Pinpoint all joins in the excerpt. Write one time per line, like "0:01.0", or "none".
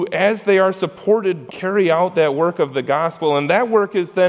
0:01.5